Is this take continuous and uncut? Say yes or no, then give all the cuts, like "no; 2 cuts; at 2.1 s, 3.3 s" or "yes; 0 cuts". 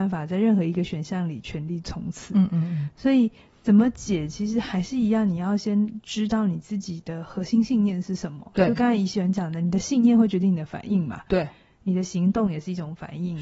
yes; 0 cuts